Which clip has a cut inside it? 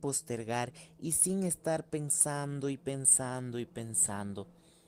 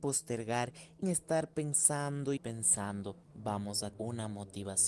second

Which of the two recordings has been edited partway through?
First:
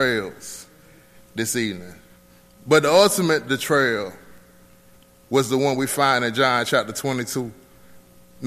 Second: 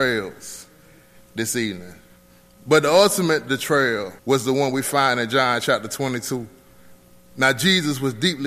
second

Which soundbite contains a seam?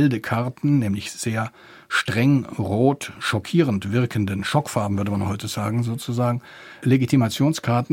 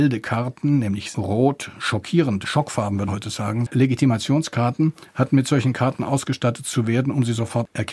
second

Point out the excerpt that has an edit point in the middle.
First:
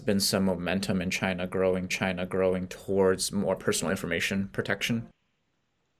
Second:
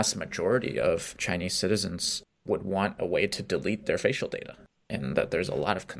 first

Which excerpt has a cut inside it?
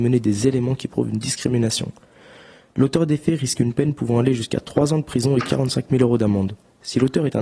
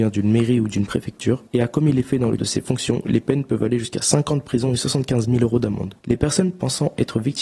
second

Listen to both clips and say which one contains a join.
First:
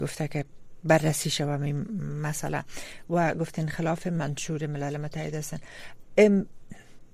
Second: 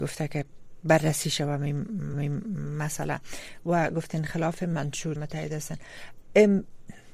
second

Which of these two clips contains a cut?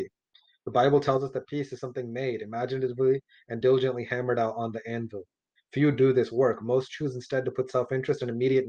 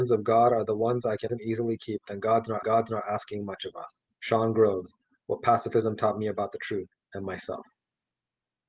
second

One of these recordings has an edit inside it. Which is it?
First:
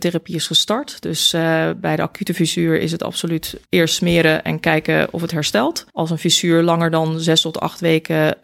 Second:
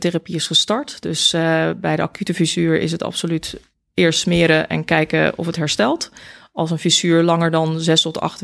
first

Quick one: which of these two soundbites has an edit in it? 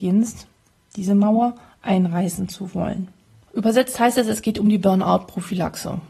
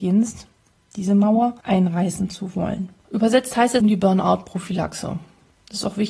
second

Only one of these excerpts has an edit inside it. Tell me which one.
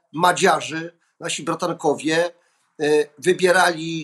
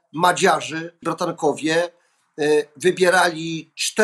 second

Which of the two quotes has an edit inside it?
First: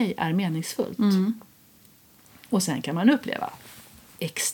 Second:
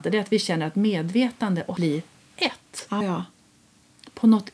second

